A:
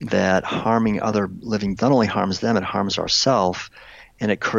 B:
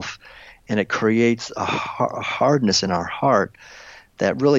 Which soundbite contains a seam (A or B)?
A